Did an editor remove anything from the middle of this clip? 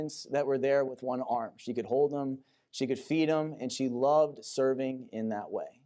no; 0 cuts

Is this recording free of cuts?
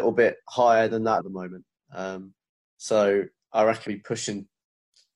no; 2 cuts; at 1.2 s, 3.9 s

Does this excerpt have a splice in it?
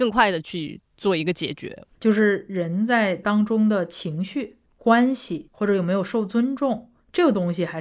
yes; 1 cut; at 1.9 s

